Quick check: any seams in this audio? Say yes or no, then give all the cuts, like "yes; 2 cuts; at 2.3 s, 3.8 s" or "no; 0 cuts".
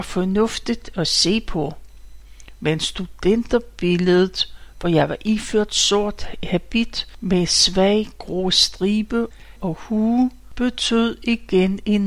no; 0 cuts